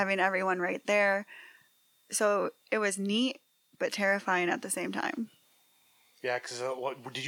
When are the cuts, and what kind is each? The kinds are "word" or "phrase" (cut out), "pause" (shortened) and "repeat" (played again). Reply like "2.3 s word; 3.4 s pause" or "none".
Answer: none